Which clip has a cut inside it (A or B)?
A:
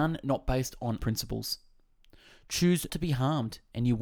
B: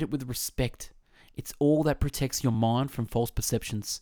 A